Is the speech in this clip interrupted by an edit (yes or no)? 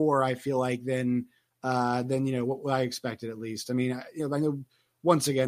no